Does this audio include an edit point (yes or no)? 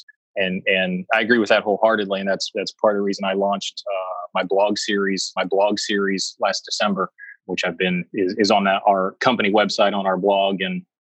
yes